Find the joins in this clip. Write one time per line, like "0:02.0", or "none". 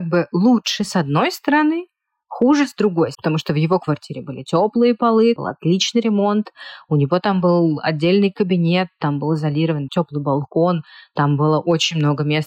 0:03.1
0:05.4
0:09.9